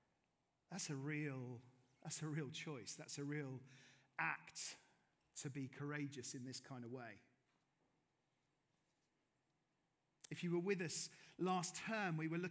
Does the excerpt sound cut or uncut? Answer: uncut